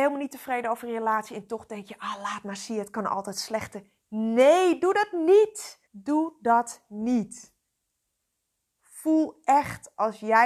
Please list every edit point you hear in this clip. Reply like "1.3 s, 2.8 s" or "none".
5.9 s